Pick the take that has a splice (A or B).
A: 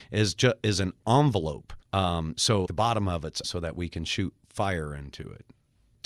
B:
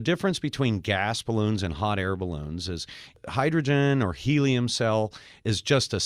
A